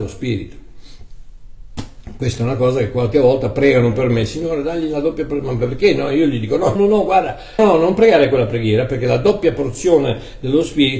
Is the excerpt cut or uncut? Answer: cut